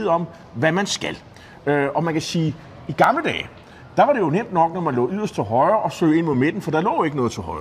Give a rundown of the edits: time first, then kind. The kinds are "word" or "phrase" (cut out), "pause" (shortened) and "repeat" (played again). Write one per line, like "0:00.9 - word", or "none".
none